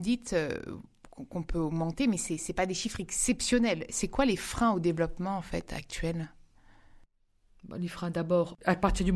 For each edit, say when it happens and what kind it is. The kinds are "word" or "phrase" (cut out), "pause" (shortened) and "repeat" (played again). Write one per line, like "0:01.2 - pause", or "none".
none